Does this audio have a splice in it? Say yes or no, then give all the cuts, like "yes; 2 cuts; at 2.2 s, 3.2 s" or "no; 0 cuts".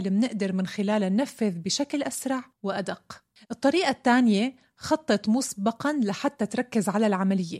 yes; 1 cut; at 2.5 s